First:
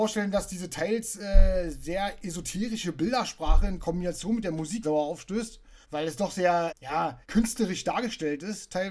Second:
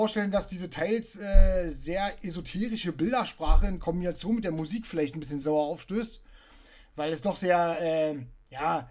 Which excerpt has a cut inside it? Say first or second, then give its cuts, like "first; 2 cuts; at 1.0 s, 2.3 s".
first; 4 cuts; at 4.8 s, 5.8 s, 6.7 s, 7.2 s